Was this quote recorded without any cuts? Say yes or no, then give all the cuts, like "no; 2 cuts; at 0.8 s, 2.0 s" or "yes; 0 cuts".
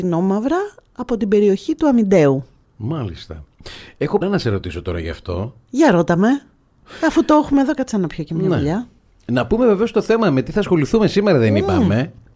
no; 1 cut; at 4.2 s